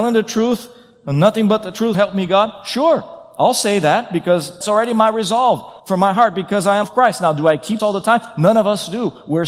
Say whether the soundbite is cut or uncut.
cut